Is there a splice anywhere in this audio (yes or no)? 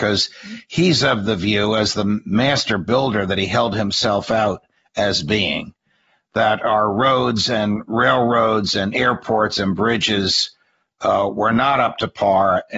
no